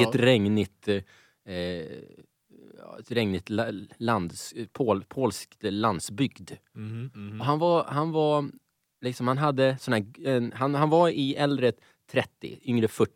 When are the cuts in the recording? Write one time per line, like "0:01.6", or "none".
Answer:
none